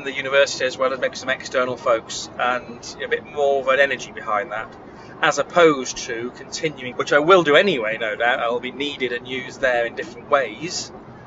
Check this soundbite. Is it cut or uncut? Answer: cut